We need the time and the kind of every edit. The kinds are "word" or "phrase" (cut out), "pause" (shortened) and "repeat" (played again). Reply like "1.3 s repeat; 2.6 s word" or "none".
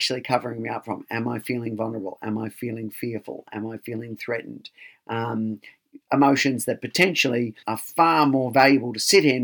7.6 s word